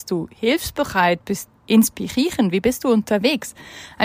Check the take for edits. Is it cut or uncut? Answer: cut